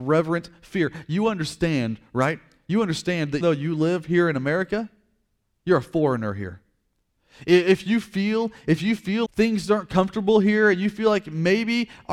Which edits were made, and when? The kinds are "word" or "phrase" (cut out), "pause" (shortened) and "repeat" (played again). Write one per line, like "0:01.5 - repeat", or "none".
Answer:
0:03.4 - word
0:09.3 - word